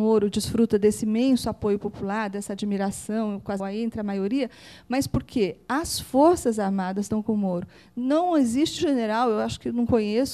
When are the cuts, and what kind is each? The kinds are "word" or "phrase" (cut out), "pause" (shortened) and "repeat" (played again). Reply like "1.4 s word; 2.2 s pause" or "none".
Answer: 3.6 s word; 8.8 s word